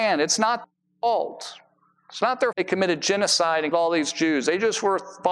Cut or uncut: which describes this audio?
cut